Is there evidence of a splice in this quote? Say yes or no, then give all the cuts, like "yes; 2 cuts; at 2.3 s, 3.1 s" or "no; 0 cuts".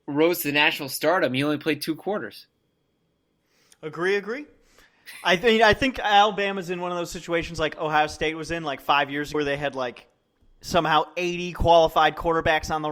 yes; 1 cut; at 9.3 s